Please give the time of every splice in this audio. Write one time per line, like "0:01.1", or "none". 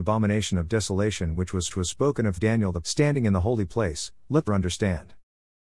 0:01.7
0:02.4
0:02.8
0:04.5